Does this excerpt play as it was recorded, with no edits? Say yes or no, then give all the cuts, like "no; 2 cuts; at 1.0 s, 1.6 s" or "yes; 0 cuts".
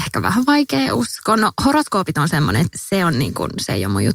yes; 0 cuts